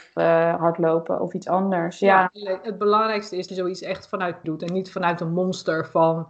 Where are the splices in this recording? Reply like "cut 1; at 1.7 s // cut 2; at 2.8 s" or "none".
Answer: cut 1; at 3.5 s // cut 2; at 4.4 s